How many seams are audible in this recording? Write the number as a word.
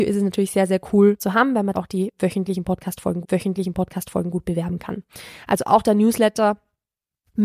three